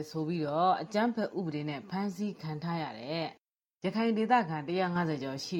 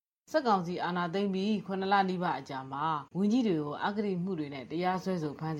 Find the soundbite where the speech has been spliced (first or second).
second